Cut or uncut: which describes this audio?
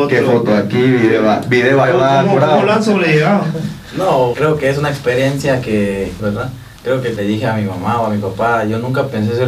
cut